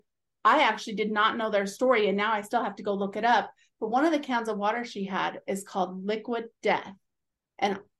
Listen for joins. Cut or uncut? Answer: uncut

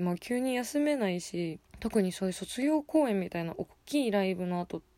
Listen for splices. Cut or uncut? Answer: cut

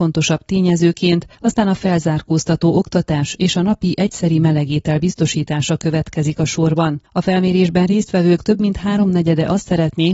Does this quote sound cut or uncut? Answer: cut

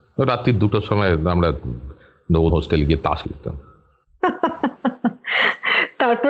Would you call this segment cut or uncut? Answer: cut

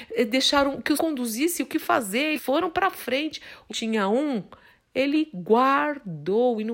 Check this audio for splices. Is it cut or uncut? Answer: cut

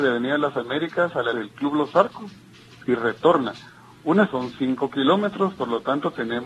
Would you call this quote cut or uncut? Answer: cut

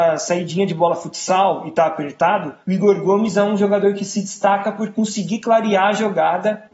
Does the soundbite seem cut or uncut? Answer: cut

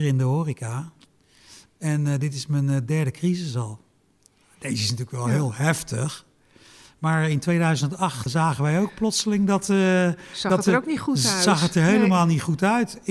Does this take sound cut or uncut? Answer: cut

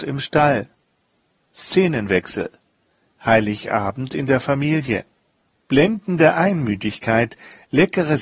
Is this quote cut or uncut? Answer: uncut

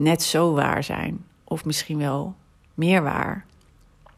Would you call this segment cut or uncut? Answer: uncut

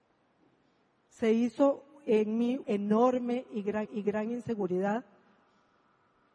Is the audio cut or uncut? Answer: cut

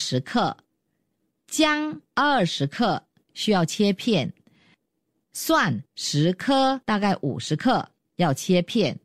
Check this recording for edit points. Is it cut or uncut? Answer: cut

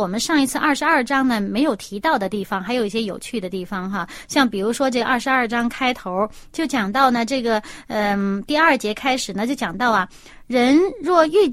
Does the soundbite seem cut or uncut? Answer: uncut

